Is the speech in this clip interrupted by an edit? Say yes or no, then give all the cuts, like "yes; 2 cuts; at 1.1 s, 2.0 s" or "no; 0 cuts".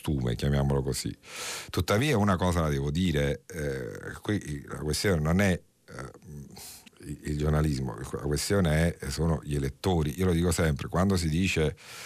yes; 1 cut; at 6.9 s